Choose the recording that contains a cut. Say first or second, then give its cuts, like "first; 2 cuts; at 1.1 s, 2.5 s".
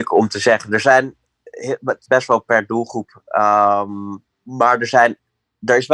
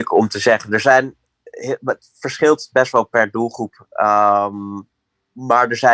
first; 2 cuts; at 2.1 s, 4.3 s